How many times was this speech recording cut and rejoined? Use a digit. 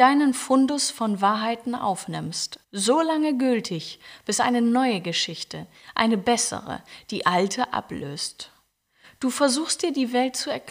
1